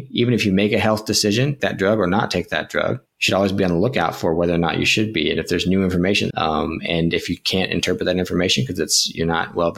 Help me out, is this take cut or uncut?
cut